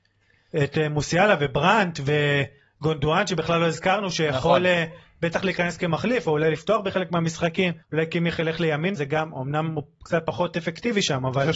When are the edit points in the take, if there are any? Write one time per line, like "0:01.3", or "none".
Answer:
0:07.8
0:09.0